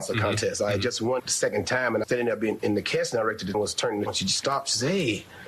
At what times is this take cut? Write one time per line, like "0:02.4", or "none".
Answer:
0:01.2
0:02.0
0:02.6
0:03.5
0:04.1